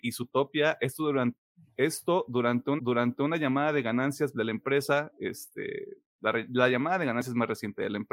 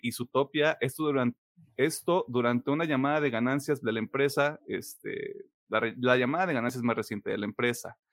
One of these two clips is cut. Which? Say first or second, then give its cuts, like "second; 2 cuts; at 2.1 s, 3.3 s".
first; 1 cut; at 2.8 s